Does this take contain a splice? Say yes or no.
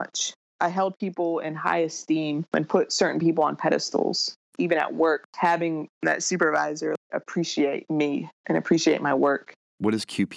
no